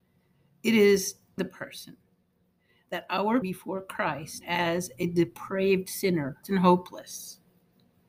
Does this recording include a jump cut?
yes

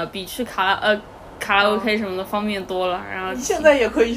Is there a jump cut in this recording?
no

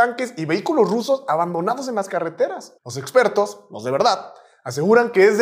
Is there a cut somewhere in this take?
no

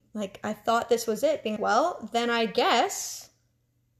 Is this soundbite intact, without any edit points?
no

